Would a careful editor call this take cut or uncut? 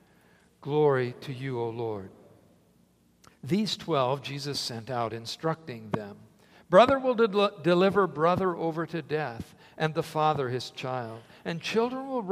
uncut